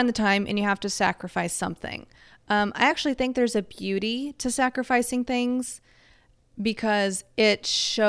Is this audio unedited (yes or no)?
yes